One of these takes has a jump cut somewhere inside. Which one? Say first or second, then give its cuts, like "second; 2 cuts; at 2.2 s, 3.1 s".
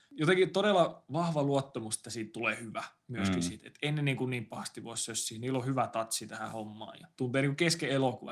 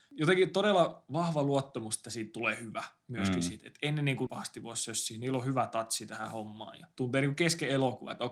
second; 1 cut; at 4.3 s